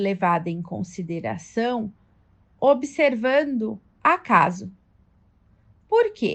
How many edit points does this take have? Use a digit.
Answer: 1